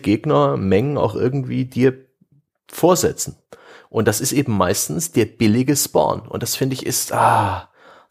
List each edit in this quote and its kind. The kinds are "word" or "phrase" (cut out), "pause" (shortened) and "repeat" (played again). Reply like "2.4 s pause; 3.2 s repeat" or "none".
none